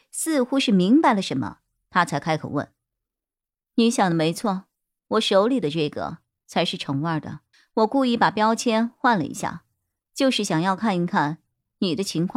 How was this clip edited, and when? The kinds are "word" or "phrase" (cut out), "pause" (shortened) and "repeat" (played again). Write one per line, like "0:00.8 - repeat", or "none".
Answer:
0:07.5 - pause